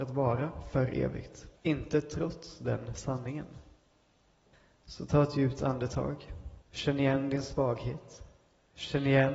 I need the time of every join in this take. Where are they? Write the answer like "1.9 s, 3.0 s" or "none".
1.6 s, 4.5 s, 6.6 s